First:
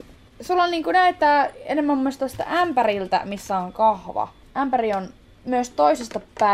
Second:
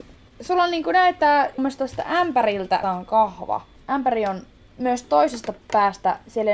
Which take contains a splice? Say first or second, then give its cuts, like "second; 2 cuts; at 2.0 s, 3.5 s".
second; 2 cuts; at 1.6 s, 2.8 s